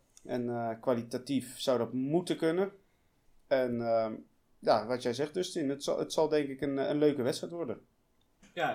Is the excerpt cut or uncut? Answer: cut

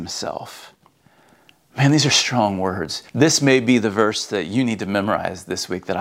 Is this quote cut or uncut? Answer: cut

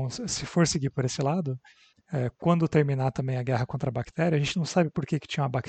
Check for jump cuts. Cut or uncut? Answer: uncut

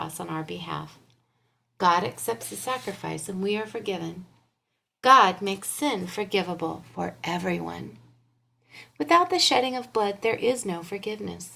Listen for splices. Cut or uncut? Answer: uncut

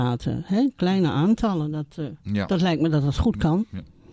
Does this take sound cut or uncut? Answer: uncut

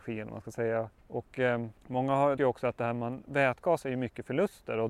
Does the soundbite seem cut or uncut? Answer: cut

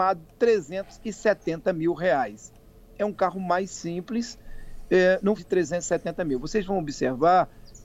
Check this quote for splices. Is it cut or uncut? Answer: cut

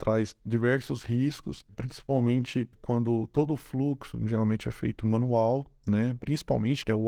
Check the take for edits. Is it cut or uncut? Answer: uncut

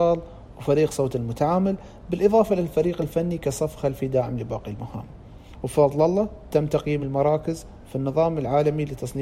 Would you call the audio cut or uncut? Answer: uncut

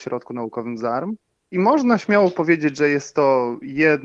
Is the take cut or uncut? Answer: uncut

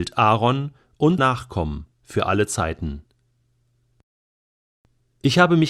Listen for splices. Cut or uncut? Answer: cut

